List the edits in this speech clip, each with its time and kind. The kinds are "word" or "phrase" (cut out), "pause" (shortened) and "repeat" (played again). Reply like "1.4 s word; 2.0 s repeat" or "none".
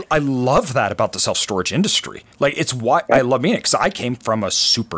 2.3 s pause